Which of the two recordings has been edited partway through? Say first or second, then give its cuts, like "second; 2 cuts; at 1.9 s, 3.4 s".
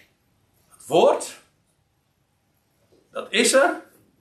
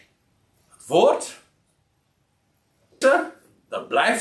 second; 1 cut; at 3.0 s